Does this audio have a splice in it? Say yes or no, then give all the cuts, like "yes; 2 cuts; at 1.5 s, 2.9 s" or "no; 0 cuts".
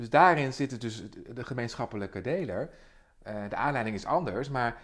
no; 0 cuts